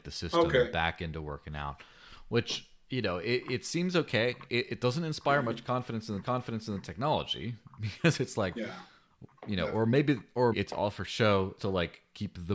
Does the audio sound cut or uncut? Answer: cut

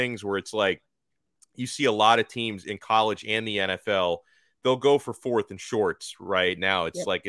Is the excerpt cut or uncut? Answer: uncut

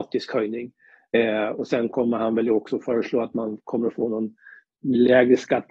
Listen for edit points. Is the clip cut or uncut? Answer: uncut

